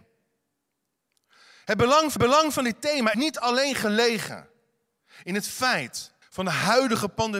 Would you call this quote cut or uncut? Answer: cut